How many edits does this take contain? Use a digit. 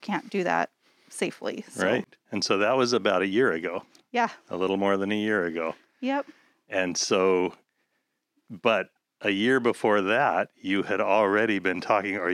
0